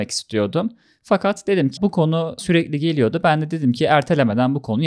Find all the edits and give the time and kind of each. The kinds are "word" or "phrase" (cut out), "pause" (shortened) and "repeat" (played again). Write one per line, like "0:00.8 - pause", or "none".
0:01.8 - word
0:02.4 - word